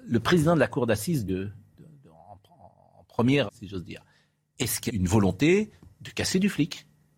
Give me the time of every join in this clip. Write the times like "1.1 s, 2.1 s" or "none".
1.3 s, 3.5 s, 4.9 s